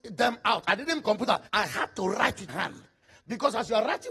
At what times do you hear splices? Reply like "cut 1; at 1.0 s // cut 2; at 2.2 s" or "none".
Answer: cut 1; at 1.0 s // cut 2; at 1.5 s // cut 3; at 2.5 s